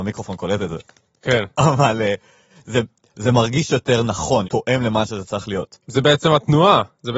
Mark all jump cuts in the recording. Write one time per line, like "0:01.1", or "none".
0:04.4